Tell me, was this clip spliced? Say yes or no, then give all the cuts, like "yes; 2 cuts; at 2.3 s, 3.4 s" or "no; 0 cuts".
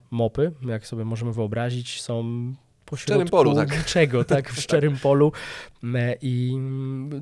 no; 0 cuts